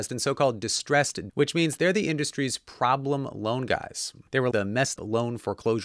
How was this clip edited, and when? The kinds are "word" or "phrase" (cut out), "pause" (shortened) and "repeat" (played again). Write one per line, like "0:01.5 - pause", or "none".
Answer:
0:01.3 - word
0:01.8 - word
0:04.5 - word
0:05.0 - word